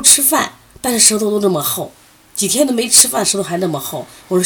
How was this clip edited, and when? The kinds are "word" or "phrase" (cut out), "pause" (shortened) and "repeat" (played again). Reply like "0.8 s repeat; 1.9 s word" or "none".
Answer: none